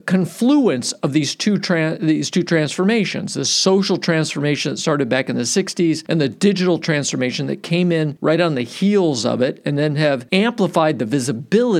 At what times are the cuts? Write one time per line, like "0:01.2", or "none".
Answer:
none